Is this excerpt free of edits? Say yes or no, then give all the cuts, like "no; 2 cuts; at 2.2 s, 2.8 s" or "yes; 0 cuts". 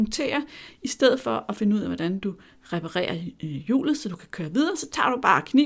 yes; 0 cuts